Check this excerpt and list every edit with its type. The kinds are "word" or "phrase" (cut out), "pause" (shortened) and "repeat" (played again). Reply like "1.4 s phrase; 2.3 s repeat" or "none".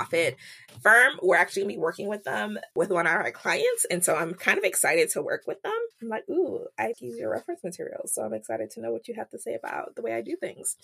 5.9 s pause; 6.9 s word

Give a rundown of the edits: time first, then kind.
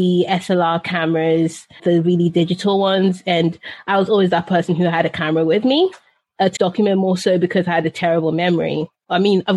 1.8 s word; 6.6 s word

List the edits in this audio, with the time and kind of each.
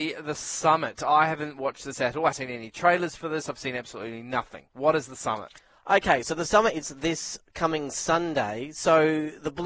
2.3 s word; 4.7 s pause; 6.8 s word

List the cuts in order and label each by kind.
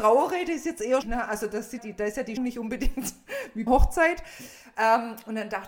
1.0 s word; 1.8 s word; 2.4 s word; 3.7 s word

